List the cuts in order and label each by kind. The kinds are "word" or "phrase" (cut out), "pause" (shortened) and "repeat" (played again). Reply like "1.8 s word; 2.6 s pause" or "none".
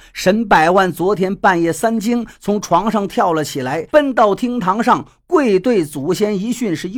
3.9 s pause